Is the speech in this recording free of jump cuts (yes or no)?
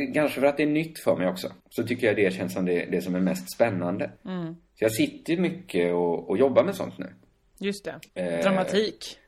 no